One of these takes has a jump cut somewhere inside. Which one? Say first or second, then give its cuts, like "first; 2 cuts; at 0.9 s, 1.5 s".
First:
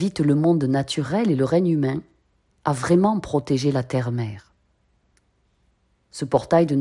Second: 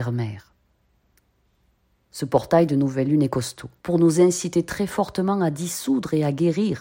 second; 1 cut; at 3.8 s